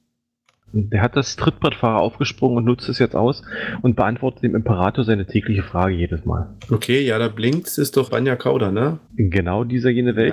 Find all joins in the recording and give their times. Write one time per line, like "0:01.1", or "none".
0:01.4
0:06.6
0:08.1
0:09.1